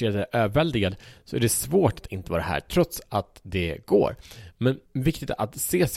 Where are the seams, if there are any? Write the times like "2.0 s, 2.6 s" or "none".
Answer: 4.9 s